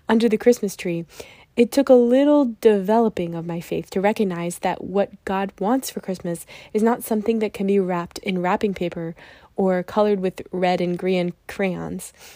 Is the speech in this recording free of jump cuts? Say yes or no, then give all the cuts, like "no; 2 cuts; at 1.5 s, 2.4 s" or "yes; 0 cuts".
yes; 0 cuts